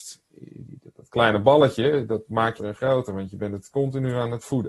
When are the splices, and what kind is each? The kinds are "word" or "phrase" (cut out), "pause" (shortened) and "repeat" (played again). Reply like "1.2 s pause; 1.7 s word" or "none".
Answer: 2.6 s phrase